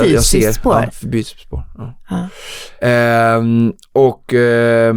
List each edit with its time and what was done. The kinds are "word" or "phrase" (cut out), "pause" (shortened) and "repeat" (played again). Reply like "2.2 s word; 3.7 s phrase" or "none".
2.8 s pause